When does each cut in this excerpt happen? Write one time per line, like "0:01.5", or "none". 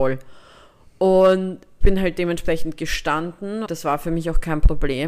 0:01.8
0:03.7